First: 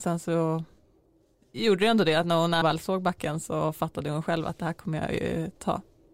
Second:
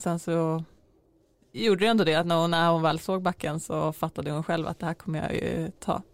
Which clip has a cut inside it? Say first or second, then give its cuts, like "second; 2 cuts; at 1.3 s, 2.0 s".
first; 1 cut; at 2.6 s